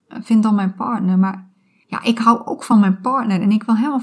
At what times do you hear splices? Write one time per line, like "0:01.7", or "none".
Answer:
none